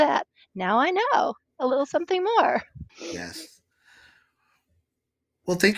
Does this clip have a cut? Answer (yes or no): yes